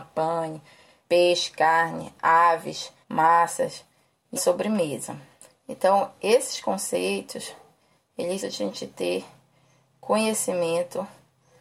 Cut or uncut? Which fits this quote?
cut